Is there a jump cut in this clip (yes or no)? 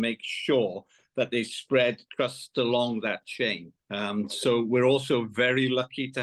yes